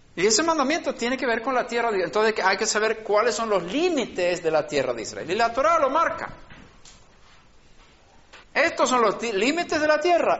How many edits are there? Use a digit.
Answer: 1